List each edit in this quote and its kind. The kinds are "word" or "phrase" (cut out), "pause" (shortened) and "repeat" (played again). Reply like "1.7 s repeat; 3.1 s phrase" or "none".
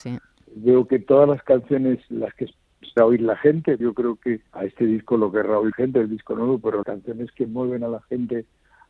2.1 s word; 3.0 s word; 3.8 s word; 4.5 s pause; 5.7 s word; 6.8 s word